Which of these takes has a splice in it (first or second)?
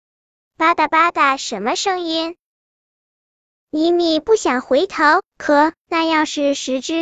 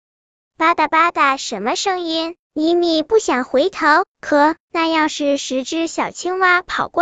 second